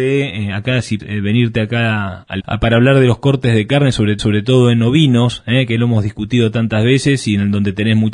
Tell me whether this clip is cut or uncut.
cut